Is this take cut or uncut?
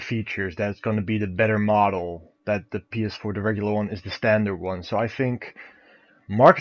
uncut